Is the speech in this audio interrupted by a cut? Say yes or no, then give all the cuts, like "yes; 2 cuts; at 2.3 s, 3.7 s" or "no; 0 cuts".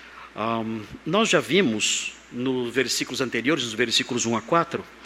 yes; 1 cut; at 2.7 s